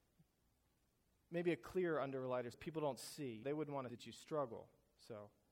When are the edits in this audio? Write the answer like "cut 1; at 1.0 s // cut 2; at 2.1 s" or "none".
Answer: cut 1; at 2.5 s // cut 2; at 3.4 s // cut 3; at 3.9 s

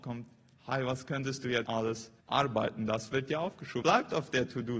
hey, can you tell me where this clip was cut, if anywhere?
cut 1; at 1.7 s // cut 2; at 2.2 s // cut 3; at 3.8 s

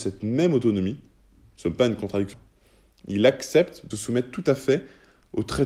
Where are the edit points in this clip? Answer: cut 1; at 2.3 s // cut 2; at 3.9 s

